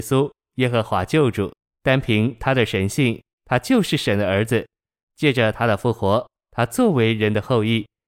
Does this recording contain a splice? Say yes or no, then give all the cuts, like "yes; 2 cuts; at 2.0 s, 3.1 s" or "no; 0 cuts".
no; 0 cuts